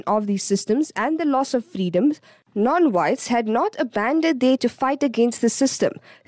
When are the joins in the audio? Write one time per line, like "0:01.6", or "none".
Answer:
0:04.6